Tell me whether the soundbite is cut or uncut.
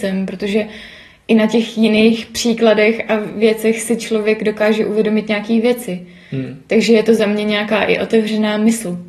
uncut